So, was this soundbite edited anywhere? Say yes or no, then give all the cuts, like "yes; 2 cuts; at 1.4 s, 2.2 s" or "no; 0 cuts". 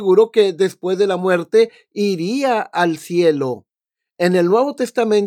no; 0 cuts